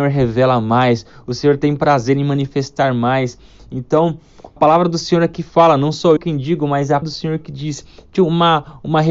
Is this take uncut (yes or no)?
no